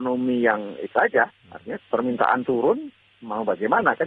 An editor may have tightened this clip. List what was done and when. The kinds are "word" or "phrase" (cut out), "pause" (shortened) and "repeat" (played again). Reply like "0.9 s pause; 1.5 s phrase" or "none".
0.9 s word; 1.8 s word